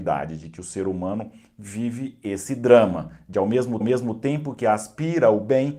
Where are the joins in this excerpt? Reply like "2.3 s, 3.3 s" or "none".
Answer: 3.8 s